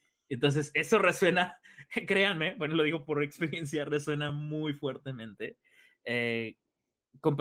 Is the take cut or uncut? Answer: uncut